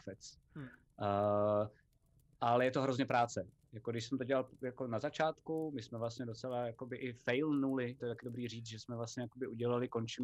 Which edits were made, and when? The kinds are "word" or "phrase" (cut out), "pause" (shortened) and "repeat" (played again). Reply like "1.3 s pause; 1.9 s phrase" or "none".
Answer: 8.0 s word